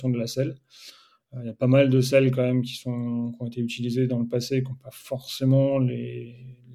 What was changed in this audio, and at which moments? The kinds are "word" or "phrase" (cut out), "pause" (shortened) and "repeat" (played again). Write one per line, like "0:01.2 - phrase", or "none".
none